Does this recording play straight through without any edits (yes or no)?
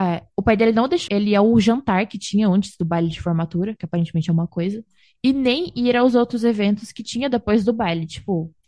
no